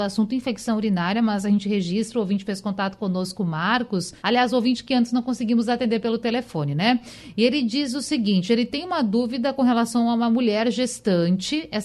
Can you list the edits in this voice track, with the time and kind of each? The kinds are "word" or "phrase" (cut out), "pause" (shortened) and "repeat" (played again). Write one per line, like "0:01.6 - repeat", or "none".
0:04.2 - pause